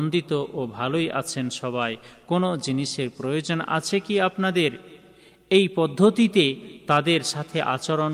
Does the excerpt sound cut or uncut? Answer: uncut